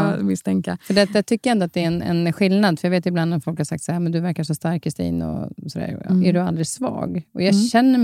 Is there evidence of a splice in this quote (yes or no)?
no